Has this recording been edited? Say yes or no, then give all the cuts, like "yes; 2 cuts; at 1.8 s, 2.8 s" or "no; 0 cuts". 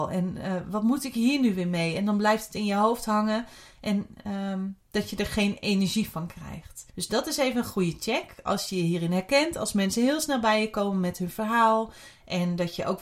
yes; 2 cuts; at 4.8 s, 6.9 s